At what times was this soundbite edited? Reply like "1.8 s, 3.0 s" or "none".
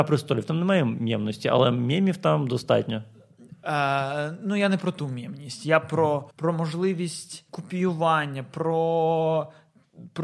6.3 s, 7.5 s